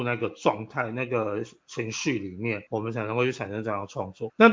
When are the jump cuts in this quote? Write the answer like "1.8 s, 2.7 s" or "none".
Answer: 2.7 s